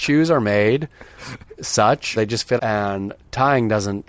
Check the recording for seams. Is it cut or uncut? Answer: cut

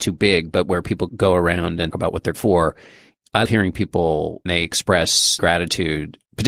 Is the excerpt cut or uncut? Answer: cut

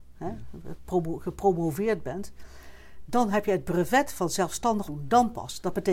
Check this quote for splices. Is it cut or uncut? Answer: cut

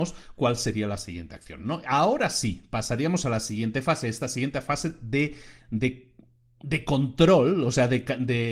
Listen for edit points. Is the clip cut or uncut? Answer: uncut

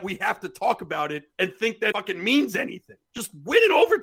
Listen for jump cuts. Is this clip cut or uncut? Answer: cut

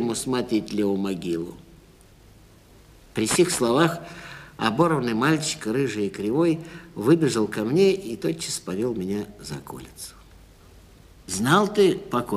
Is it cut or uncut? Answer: uncut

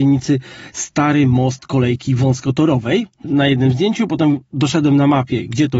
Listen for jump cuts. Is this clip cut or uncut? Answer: cut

